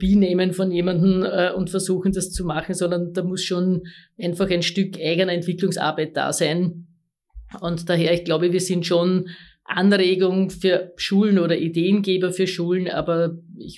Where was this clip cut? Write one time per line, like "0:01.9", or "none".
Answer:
none

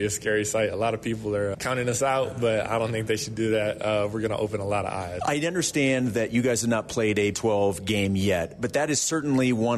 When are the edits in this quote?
0:01.5
0:05.2
0:07.3

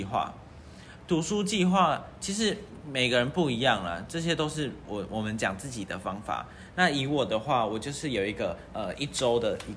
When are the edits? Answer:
0:04.1

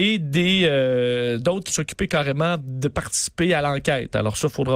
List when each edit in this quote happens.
0:01.7

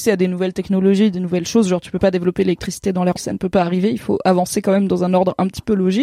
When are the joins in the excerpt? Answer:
0:03.1

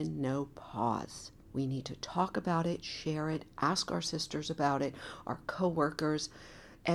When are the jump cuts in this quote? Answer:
0:01.4

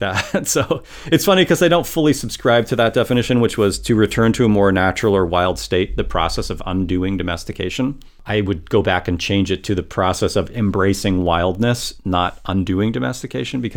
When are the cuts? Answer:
none

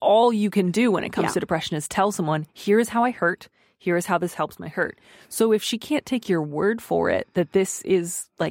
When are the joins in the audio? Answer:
none

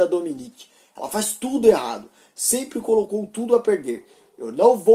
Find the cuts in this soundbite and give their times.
none

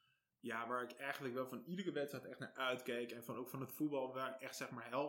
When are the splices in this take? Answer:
none

